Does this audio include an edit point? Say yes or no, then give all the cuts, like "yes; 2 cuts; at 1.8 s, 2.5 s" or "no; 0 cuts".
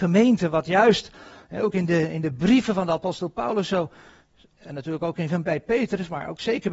no; 0 cuts